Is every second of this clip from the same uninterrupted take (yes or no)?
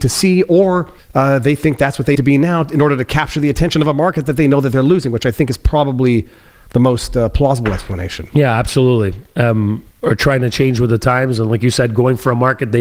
no